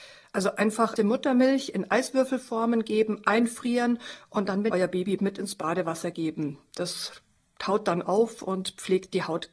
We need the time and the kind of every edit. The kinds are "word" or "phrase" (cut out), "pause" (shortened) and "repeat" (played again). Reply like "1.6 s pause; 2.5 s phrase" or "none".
1.0 s word; 4.7 s word; 5.2 s word